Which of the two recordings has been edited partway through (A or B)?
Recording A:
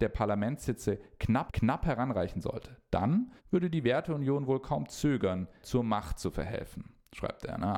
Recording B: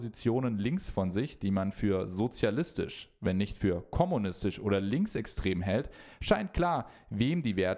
A